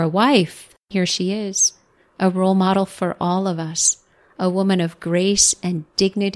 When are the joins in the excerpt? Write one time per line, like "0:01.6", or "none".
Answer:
0:00.9